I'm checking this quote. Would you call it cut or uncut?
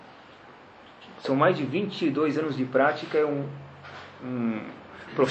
uncut